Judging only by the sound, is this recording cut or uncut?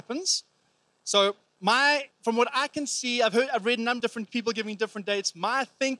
cut